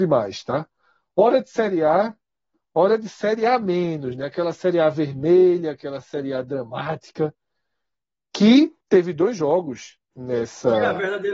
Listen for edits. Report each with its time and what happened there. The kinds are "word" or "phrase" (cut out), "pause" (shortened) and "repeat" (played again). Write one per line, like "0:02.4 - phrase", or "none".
0:08.8 - pause
0:10.0 - pause